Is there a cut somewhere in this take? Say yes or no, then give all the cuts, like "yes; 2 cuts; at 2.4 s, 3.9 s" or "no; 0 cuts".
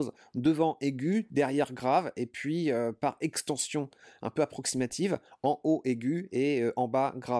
no; 0 cuts